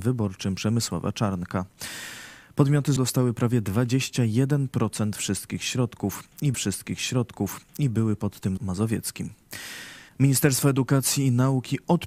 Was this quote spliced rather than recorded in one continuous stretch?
yes; 4 cuts; at 3.0 s, 6.5 s, 8.6 s, 10.1 s

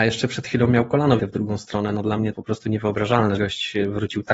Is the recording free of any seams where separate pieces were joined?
no; 3 cuts; at 1.2 s, 2.3 s, 3.4 s

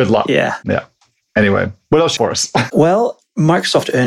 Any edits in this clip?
yes; 1 cut; at 2.2 s

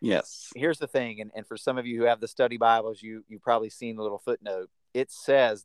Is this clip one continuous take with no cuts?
yes; 0 cuts

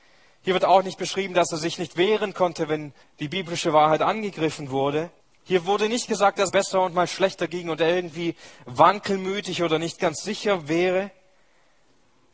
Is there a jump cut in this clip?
yes; 3 cuts; at 3.0 s, 5.2 s, 6.5 s

